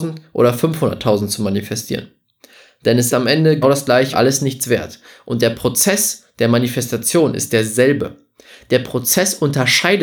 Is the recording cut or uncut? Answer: cut